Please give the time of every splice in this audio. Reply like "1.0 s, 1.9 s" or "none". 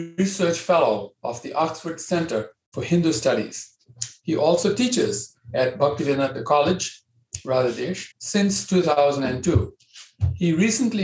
8.1 s